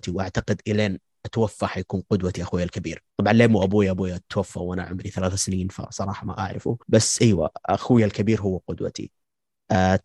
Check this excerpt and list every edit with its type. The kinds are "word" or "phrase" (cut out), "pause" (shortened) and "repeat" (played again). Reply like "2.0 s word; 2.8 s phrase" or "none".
3.1 s pause; 4.3 s pause; 6.8 s pause